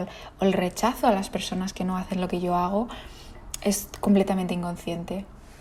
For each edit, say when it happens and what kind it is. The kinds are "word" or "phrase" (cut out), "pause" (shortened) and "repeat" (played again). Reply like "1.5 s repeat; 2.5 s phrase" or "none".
none